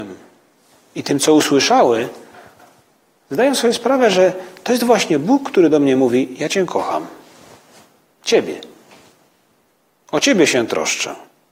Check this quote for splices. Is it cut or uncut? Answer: uncut